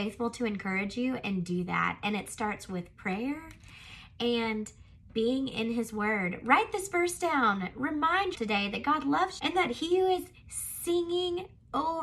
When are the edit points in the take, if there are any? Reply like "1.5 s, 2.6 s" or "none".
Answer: 8.3 s, 9.4 s